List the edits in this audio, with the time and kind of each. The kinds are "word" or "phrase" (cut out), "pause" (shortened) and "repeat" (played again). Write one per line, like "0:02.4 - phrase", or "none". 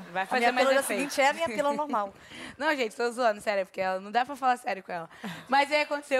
none